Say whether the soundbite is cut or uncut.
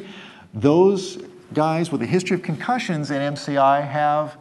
uncut